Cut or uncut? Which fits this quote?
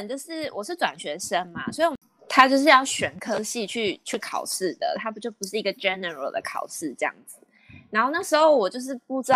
uncut